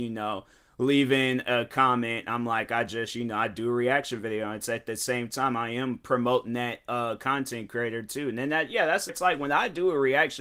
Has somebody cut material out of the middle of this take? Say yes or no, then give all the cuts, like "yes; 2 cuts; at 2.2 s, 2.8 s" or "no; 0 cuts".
yes; 1 cut; at 9.1 s